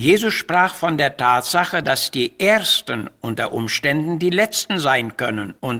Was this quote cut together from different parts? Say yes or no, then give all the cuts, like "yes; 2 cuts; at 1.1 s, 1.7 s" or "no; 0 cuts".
no; 0 cuts